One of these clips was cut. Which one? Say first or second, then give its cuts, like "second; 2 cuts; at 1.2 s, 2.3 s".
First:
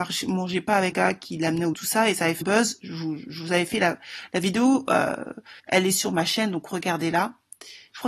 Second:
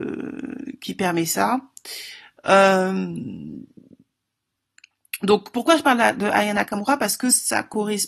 first; 4 cuts; at 0.9 s, 1.7 s, 2.4 s, 5.6 s